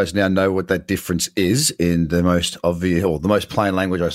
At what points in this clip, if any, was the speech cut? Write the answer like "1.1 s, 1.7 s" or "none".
none